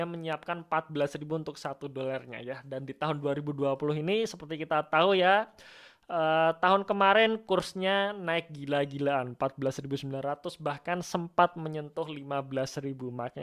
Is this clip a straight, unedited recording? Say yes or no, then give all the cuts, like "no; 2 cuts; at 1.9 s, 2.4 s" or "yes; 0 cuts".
yes; 0 cuts